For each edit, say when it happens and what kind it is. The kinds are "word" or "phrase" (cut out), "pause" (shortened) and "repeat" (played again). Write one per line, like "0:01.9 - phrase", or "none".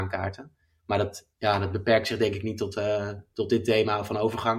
0:01.3 - pause